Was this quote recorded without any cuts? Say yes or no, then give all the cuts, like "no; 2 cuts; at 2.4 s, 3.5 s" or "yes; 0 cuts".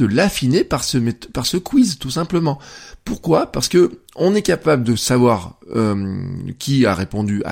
yes; 0 cuts